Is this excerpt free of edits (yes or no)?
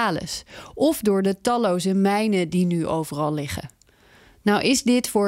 yes